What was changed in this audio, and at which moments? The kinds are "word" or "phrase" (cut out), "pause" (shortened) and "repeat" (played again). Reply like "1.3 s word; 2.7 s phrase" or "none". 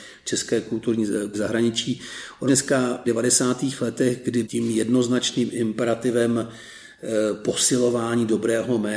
1.3 s word; 2.5 s word; 3.1 s phrase; 4.4 s word